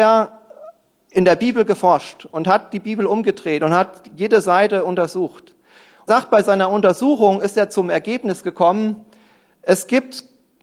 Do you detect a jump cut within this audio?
yes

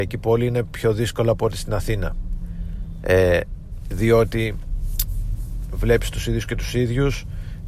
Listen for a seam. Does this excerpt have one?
no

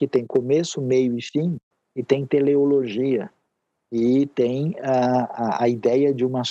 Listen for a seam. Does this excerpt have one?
no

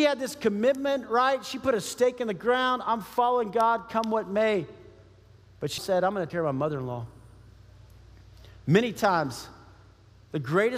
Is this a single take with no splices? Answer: no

